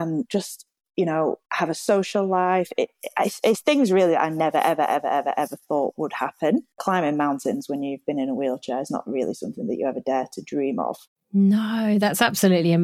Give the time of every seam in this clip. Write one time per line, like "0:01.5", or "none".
0:01.4
0:11.1